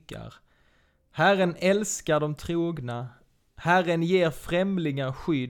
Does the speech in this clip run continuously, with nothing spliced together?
yes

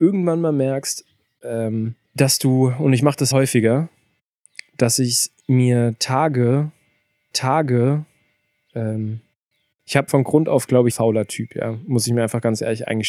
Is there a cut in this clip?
yes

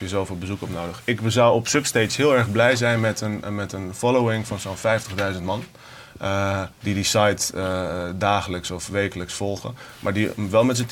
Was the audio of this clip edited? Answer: yes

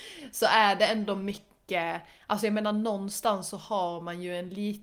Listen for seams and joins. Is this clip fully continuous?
yes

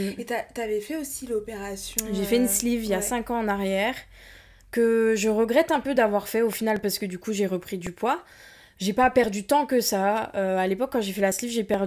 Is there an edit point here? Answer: no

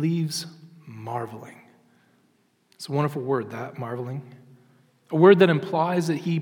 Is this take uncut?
yes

